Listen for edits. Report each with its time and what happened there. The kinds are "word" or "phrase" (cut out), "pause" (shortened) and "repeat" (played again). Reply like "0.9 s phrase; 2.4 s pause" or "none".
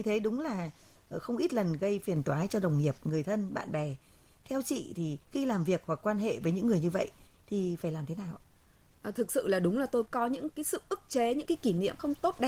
5.2 s pause